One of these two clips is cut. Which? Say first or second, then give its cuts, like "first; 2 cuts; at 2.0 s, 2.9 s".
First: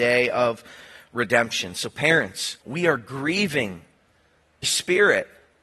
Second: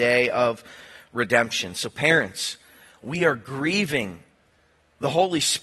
first; 2 cuts; at 2.6 s, 4.6 s